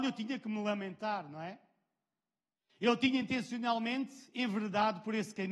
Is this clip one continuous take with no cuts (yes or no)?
yes